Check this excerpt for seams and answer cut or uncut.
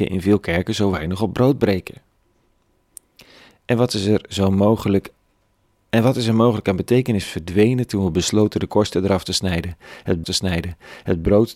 cut